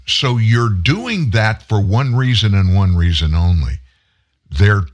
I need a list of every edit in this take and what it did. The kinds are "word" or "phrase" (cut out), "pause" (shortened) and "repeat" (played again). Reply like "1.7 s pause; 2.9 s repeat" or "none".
none